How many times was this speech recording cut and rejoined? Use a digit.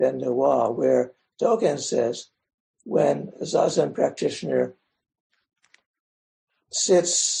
0